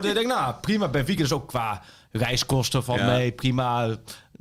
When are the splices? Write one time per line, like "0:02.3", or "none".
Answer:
none